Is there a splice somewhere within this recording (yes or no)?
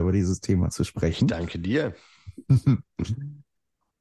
no